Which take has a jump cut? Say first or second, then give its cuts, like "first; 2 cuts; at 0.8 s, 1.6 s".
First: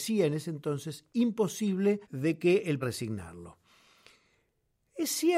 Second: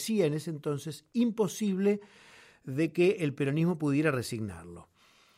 first; 2 cuts; at 2.0 s, 2.8 s